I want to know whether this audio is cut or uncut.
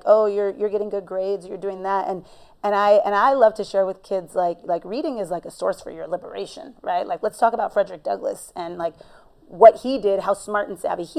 uncut